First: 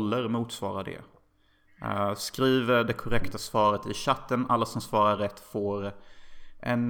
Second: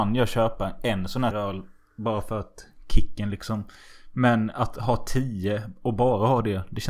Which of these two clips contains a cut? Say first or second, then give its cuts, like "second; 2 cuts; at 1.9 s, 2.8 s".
second; 1 cut; at 1.3 s